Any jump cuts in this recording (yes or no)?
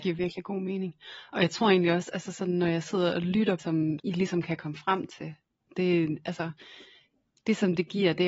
yes